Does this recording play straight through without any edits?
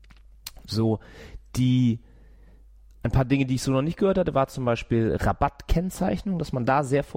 yes; 0 cuts

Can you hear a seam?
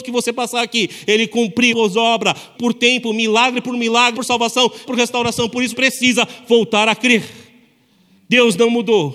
yes; 5 cuts; at 1.7 s, 2.5 s, 4.1 s, 4.9 s, 5.7 s

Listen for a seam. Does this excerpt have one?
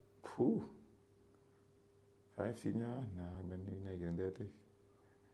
no; 0 cuts

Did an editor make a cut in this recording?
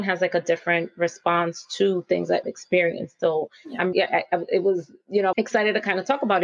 yes; 3 cuts; at 2.4 s, 3.9 s, 5.3 s

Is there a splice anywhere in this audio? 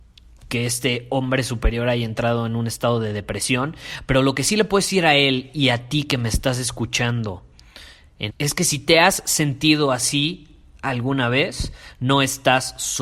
yes; 1 cut; at 8.3 s

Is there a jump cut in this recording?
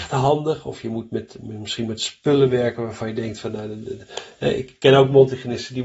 no; 0 cuts

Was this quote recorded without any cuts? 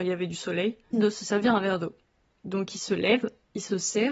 no; 1 cut; at 0.9 s

